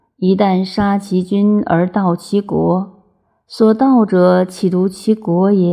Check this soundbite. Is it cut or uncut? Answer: uncut